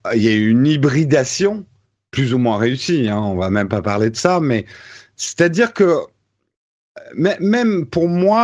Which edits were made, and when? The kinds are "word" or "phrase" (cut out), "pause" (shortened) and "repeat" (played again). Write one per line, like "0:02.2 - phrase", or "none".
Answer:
none